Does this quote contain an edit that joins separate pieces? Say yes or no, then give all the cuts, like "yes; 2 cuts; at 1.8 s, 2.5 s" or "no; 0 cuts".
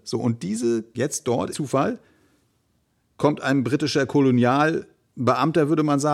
yes; 2 cuts; at 0.9 s, 1.5 s